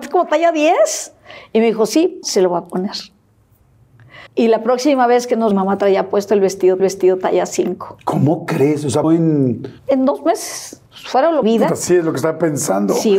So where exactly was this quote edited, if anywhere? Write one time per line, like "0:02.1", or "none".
0:02.2
0:04.3
0:05.5
0:06.8
0:09.0
0:09.8
0:10.9
0:11.4